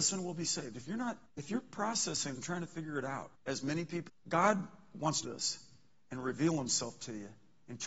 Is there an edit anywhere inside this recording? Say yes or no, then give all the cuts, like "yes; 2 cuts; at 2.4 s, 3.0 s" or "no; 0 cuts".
yes; 5 cuts; at 1.3 s, 2.4 s, 3.4 s, 4.1 s, 5.2 s